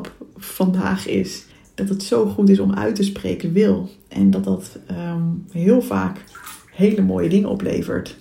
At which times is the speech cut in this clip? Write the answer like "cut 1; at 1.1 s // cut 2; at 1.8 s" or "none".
cut 1; at 1.5 s // cut 2; at 3.4 s